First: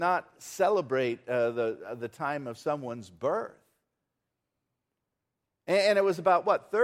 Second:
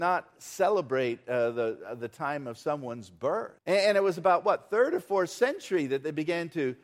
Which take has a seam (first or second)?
second